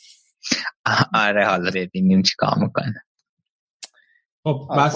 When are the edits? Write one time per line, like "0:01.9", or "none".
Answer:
0:01.7